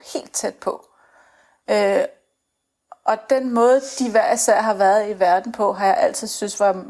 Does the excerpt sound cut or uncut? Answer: uncut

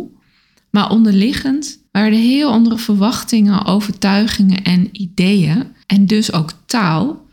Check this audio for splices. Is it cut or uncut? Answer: cut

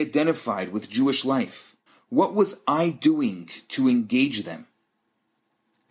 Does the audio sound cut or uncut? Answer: cut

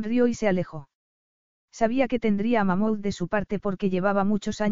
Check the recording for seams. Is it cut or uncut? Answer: uncut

